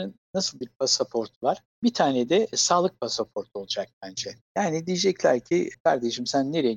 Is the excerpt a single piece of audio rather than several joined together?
no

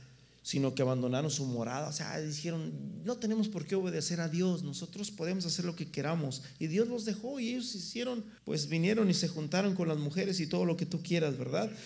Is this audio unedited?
no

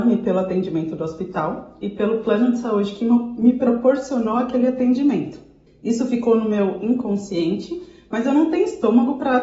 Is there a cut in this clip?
yes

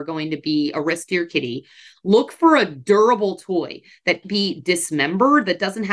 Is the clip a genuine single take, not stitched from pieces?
no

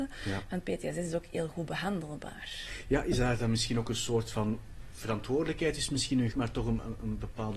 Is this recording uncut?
no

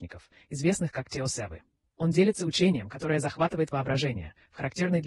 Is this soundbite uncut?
yes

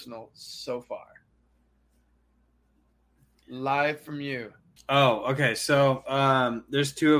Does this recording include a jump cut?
yes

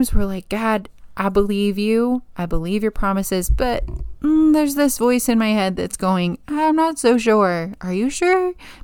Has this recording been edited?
no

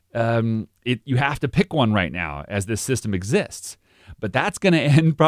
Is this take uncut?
yes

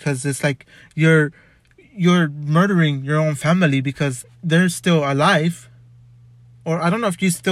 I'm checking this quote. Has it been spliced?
yes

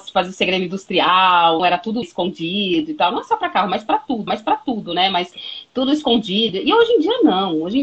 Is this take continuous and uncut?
no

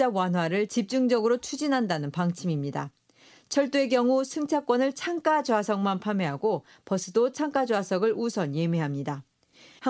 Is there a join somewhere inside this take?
no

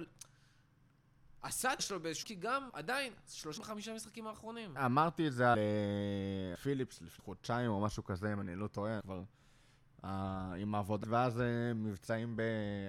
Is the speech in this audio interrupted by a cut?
yes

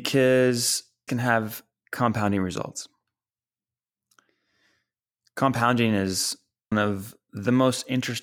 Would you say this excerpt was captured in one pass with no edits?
no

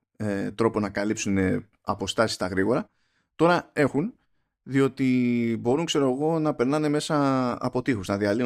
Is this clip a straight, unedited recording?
yes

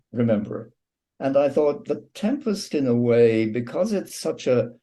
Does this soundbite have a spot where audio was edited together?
no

